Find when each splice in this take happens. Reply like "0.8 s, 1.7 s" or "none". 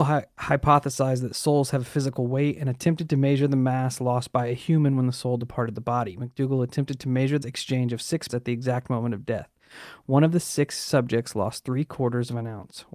7.4 s, 8.3 s